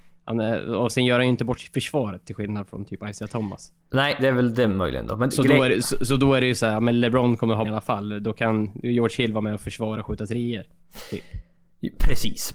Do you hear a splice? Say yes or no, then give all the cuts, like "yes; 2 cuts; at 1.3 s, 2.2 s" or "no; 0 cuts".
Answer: yes; 1 cut; at 7.6 s